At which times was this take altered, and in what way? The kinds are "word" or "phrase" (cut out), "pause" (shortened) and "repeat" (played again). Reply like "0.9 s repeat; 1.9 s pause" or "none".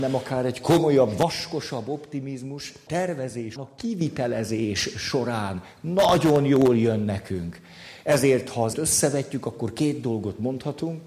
2.9 s word; 3.6 s word; 8.7 s word

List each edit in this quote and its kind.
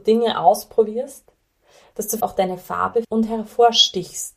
2.2 s word; 3.0 s word

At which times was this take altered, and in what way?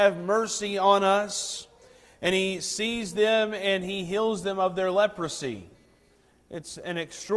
none

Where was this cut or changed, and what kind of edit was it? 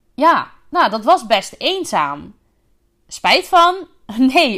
none

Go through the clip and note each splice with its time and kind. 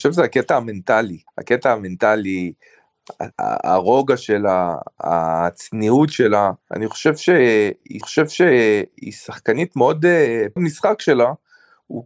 1.3 s pause; 3.3 s pause; 6.6 s pause; 8.0 s repeat; 10.6 s phrase

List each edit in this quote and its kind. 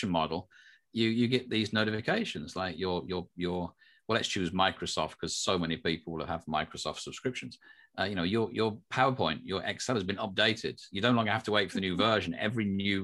none

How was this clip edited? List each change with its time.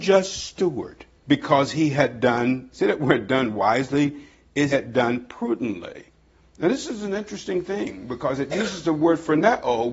1.2 s pause; 4.7 s word

